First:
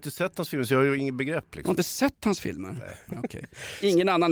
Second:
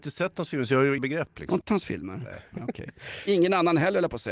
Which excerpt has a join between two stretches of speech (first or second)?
second